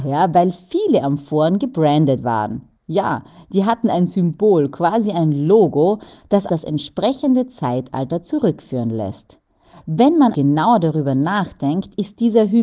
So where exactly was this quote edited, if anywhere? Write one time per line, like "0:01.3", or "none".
0:06.5
0:10.3